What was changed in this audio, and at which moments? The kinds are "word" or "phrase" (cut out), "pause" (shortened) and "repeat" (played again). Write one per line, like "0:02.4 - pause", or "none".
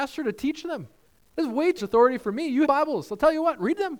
0:01.1 - pause
0:01.8 - word
0:02.7 - phrase